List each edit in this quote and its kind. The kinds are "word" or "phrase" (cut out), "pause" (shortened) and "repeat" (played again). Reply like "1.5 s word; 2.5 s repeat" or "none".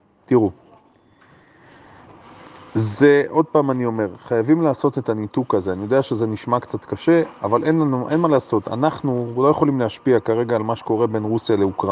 none